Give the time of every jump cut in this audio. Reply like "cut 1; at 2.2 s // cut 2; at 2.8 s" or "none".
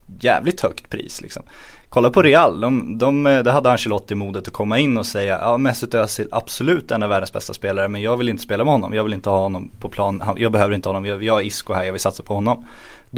none